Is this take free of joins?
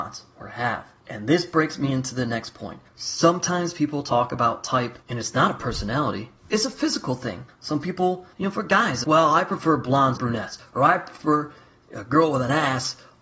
no; 8 cuts; at 1.0 s, 2.9 s, 5.0 s, 6.4 s, 7.5 s, 8.3 s, 9.0 s, 10.2 s

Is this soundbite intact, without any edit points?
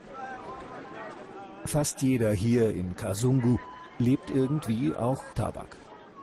no; 1 cut; at 5.3 s

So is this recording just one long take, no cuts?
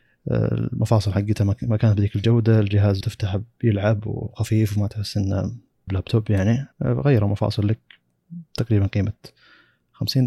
no; 3 cuts; at 3.0 s, 5.9 s, 6.7 s

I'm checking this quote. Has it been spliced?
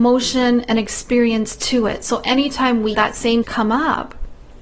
yes; 2 cuts; at 2.9 s, 3.4 s

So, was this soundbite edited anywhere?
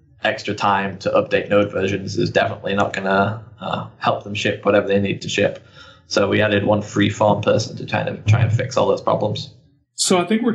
no; 0 cuts

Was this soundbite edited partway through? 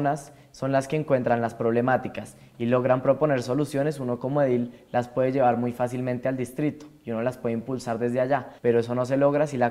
yes; 1 cut; at 8.6 s

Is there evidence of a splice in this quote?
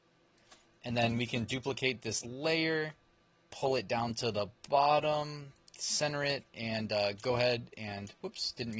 no; 0 cuts

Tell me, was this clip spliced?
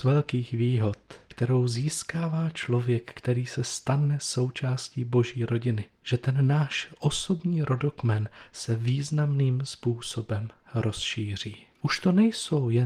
yes; 2 cuts; at 6.0 s, 11.7 s

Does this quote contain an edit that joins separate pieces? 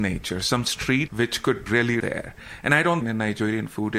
yes; 4 cuts; at 1.1 s, 1.7 s, 2.0 s, 3.0 s

